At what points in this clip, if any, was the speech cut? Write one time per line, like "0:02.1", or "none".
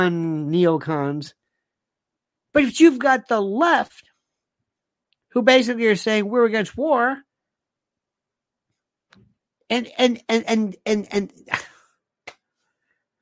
none